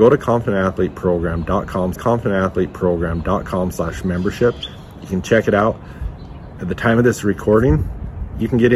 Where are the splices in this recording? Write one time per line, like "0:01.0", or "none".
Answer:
0:01.9